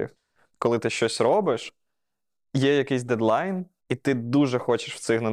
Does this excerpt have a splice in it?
no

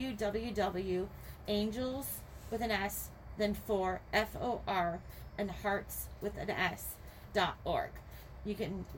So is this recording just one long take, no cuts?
no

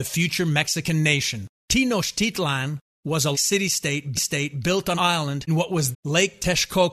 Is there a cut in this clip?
yes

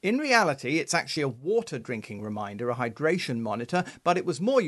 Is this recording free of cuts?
yes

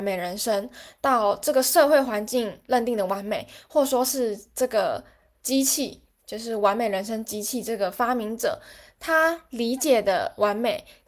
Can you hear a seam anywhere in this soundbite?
no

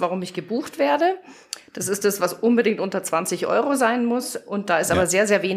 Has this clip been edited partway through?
no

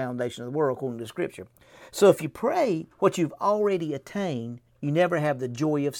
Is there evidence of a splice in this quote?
yes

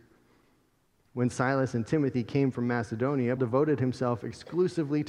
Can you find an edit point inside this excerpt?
yes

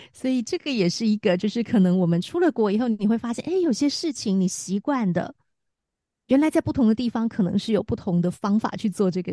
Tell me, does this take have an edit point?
no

